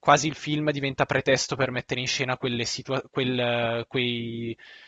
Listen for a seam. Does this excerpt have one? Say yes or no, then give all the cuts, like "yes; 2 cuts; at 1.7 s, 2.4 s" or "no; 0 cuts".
no; 0 cuts